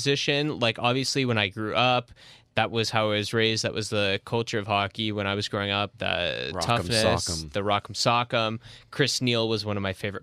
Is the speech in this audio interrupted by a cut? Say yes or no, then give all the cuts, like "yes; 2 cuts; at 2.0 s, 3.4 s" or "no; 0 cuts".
no; 0 cuts